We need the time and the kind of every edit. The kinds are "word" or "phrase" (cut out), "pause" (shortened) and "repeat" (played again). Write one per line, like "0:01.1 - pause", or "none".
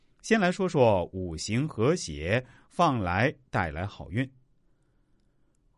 none